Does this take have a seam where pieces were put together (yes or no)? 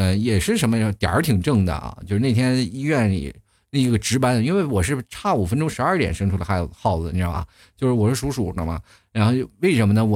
no